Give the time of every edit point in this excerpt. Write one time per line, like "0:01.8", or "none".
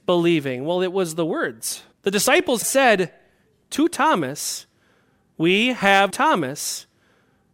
0:01.9
0:02.6
0:06.1